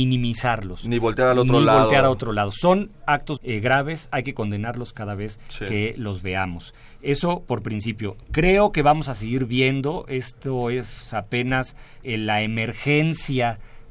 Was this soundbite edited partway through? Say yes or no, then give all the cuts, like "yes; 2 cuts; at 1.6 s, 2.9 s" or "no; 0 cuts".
yes; 2 cuts; at 3.4 s, 12.0 s